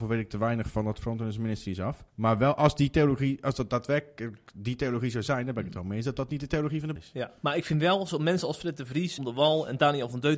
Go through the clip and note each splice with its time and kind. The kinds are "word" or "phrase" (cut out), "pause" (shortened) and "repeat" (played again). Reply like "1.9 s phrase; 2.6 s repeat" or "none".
2.1 s pause; 7.0 s word; 7.4 s pause; 9.2 s phrase